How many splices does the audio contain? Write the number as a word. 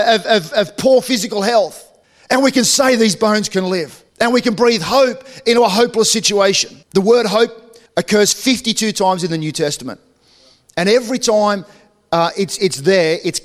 four